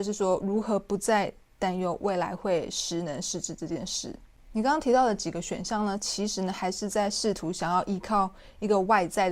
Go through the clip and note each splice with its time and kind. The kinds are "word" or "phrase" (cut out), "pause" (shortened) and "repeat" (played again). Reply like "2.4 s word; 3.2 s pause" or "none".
none